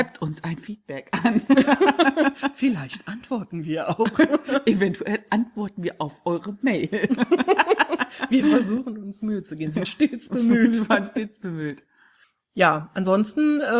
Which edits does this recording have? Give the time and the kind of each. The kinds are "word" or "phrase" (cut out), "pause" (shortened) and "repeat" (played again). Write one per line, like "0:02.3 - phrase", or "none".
0:09.8 - word
0:12.2 - pause